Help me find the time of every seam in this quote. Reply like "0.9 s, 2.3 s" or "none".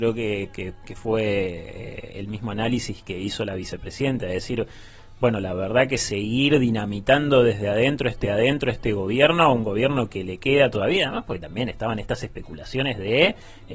8.2 s